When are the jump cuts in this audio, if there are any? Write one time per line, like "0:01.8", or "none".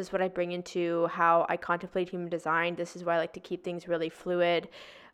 none